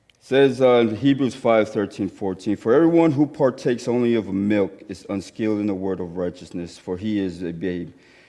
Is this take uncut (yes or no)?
yes